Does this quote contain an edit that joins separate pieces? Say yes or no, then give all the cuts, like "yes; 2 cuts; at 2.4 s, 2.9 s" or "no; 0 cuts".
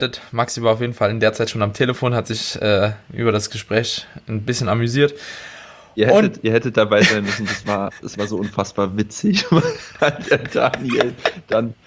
no; 0 cuts